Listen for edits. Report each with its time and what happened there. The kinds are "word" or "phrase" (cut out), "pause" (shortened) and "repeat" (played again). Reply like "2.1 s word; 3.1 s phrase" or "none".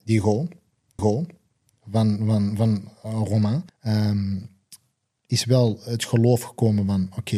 1.0 s repeat; 3.7 s pause